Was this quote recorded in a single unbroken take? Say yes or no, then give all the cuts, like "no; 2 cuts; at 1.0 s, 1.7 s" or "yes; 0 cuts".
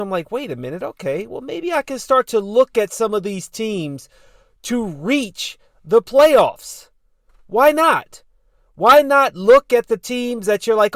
yes; 0 cuts